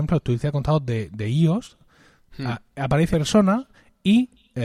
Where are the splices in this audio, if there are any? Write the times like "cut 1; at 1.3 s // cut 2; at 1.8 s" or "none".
cut 1; at 3.1 s